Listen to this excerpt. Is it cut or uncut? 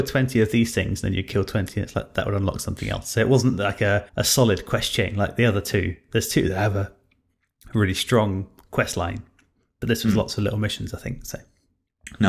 cut